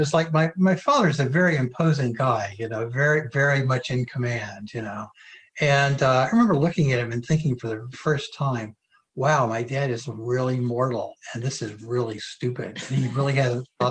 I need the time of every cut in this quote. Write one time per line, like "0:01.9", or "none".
0:07.9